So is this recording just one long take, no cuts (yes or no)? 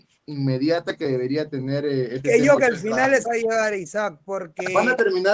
no